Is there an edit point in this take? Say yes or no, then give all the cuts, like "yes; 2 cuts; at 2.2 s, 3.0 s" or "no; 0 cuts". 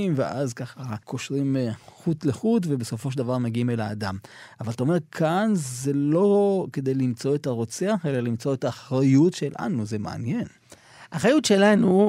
yes; 1 cut; at 1.0 s